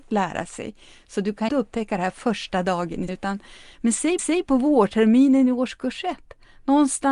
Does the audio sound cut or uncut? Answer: cut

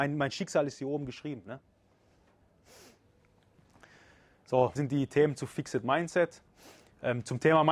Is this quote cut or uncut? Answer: cut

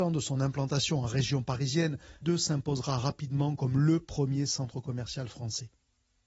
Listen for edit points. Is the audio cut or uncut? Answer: cut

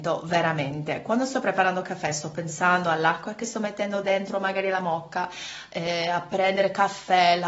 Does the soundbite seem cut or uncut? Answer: uncut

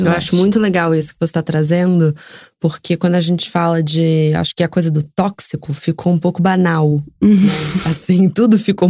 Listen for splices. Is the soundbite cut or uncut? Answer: uncut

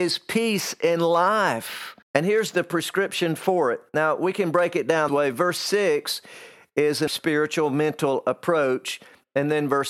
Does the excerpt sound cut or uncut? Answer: cut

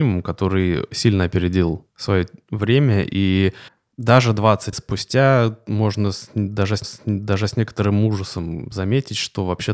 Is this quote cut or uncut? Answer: cut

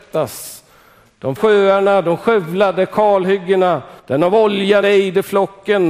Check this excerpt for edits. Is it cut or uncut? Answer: cut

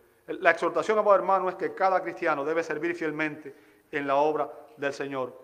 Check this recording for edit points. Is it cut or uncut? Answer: uncut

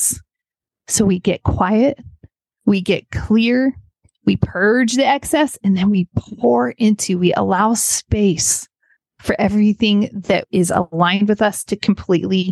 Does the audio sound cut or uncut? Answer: uncut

